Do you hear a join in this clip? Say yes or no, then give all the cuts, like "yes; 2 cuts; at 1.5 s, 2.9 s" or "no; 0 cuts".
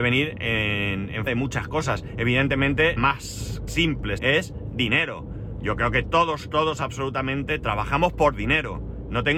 yes; 6 cuts; at 1.3 s, 3.0 s, 3.7 s, 4.2 s, 6.0 s, 7.6 s